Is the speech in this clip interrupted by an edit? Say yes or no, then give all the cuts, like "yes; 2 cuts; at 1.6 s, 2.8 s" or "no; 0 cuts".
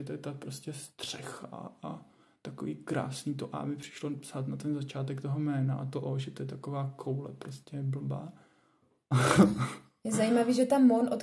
no; 0 cuts